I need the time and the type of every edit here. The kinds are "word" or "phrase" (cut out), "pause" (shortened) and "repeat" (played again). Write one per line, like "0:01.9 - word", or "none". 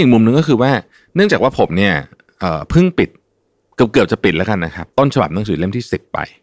none